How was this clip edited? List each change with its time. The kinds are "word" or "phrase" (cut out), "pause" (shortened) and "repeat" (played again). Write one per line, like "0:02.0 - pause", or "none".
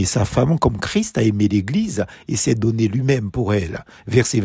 none

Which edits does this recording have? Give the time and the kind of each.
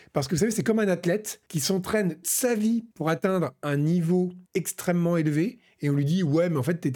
0:01.5 - pause
0:02.2 - word
0:02.9 - pause
0:04.5 - pause

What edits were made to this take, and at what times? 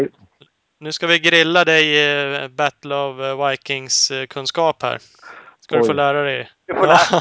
none

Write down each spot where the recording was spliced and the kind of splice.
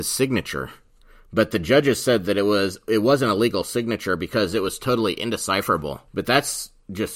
0:06.1 - pause

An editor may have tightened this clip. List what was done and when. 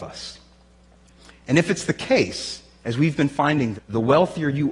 0:03.8 - word

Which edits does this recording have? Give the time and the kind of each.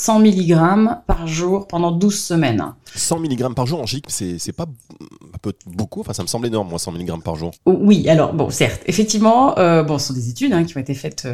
0:07.6 - pause

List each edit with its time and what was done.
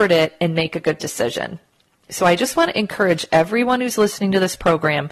none

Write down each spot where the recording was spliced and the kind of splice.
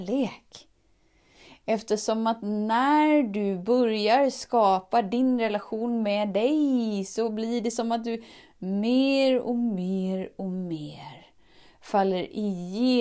none

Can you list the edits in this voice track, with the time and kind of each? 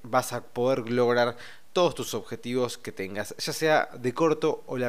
none

